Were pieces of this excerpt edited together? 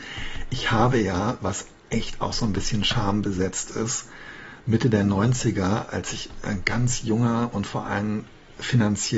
no; 0 cuts

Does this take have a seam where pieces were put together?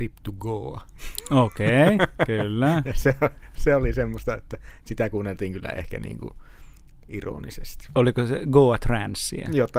no; 0 cuts

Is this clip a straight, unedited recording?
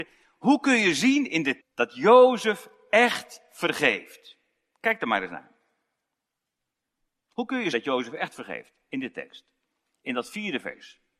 no; 2 cuts; at 1.6 s, 7.7 s

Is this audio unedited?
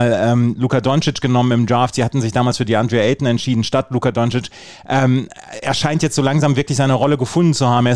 yes; 0 cuts

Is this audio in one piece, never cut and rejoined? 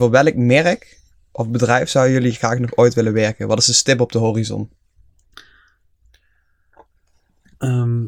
yes; 0 cuts

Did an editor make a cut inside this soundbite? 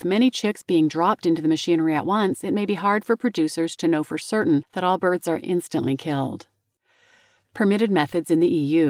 no; 0 cuts

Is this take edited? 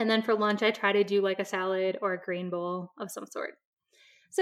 no; 0 cuts

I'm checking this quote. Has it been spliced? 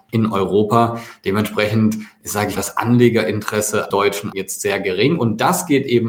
yes; 3 cuts; at 2.6 s, 3.9 s, 4.3 s

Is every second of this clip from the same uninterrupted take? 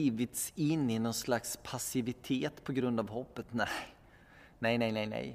yes; 0 cuts

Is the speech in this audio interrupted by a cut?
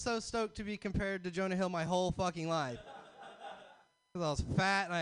no; 0 cuts

